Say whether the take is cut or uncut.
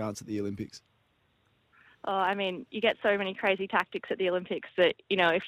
uncut